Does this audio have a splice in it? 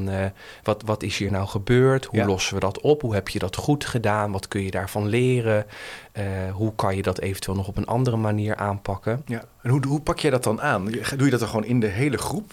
no; 0 cuts

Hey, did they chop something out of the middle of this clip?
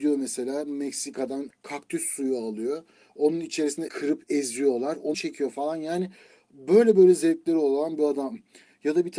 yes; 3 cuts; at 1.5 s, 3.9 s, 5.1 s

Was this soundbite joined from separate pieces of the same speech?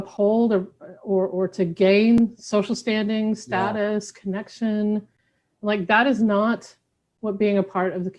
no; 0 cuts

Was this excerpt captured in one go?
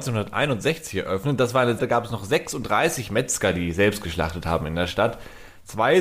no; 1 cut; at 1.8 s

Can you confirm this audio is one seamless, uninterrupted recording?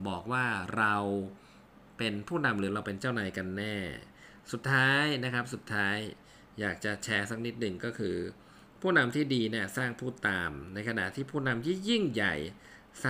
yes; 0 cuts

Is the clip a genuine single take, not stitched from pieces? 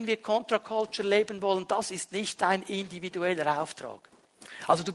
yes; 0 cuts

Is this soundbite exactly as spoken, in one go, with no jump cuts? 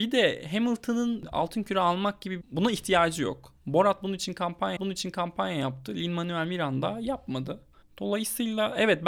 no; 3 cuts; at 2.4 s, 4.8 s, 7.8 s

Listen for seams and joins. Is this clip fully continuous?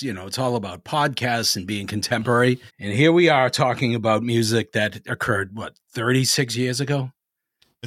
no; 1 cut; at 2.7 s

